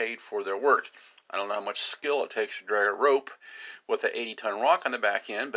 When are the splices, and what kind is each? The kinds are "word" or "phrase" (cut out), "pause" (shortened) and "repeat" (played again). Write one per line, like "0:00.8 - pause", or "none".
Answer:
none